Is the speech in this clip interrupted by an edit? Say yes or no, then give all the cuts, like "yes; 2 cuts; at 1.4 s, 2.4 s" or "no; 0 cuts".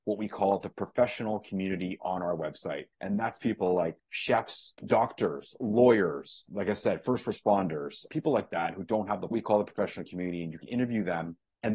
yes; 3 cuts; at 2.9 s, 4.8 s, 9.3 s